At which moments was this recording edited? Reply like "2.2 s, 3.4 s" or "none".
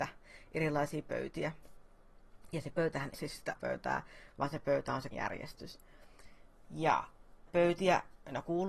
3.1 s, 3.5 s, 5.1 s, 7.5 s